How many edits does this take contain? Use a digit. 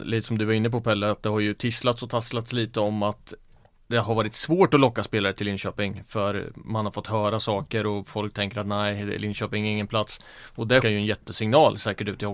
1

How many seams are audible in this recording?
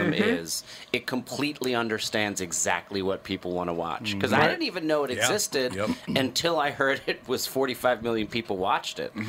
0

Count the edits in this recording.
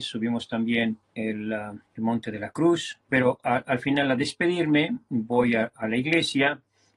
3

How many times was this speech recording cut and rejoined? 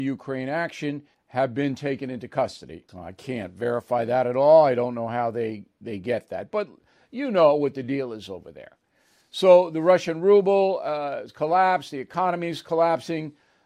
2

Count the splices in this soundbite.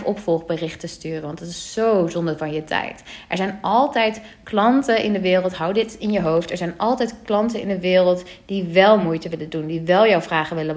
0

